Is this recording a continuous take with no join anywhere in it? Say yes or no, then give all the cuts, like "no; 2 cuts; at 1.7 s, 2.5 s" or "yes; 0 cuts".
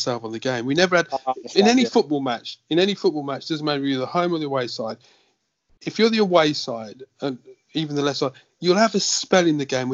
yes; 0 cuts